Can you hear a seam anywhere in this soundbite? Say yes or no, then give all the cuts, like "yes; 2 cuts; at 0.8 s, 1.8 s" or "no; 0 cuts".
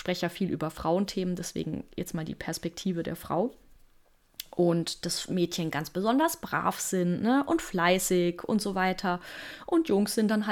no; 0 cuts